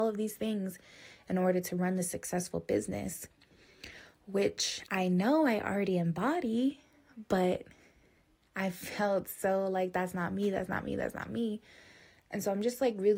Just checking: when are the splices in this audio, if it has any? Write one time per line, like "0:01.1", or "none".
none